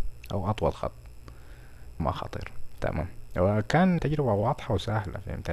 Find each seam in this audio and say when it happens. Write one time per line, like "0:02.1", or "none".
0:02.0
0:02.8
0:04.0